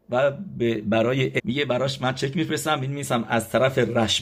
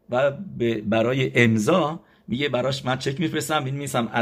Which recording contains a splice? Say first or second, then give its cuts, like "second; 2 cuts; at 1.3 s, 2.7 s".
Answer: first; 1 cut; at 1.4 s